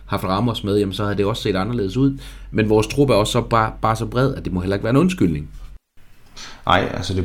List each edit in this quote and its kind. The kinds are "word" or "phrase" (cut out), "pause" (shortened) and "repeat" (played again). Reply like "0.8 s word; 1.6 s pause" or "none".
none